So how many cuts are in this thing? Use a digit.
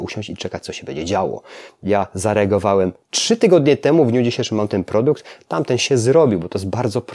0